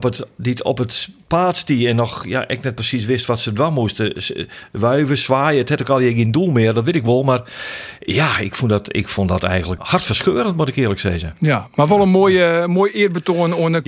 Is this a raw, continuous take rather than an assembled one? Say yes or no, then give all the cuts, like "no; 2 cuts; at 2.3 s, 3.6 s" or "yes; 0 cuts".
no; 1 cut; at 9.8 s